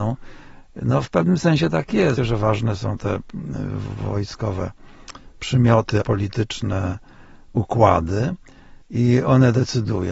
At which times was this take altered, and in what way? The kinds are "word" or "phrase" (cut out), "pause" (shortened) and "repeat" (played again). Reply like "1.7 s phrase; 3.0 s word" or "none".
2.2 s word; 6.0 s word; 8.8 s pause